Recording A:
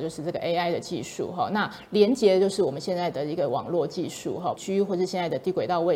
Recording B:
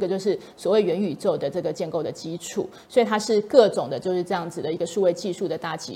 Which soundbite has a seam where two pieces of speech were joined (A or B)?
A